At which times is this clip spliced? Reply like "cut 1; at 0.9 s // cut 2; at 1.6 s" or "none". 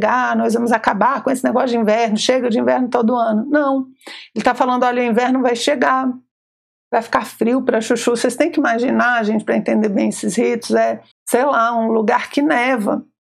cut 1; at 11.1 s